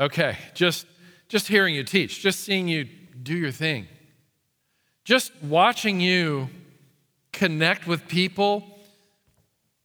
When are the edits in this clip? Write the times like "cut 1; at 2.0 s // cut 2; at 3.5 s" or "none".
none